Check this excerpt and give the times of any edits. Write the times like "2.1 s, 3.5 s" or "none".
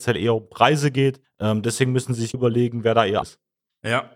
1.2 s, 2.3 s, 3.2 s